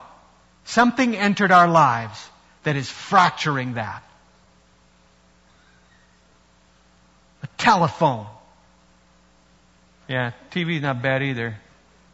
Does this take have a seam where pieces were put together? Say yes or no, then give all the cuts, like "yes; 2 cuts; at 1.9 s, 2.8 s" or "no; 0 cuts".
no; 0 cuts